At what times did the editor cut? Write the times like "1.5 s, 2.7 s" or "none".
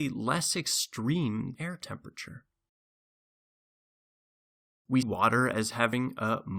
1.5 s, 5.0 s